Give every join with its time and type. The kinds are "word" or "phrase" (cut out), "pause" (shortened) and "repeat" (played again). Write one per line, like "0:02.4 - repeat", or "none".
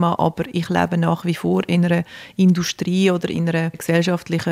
none